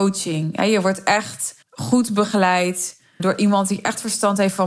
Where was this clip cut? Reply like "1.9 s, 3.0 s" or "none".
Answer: 1.6 s, 3.2 s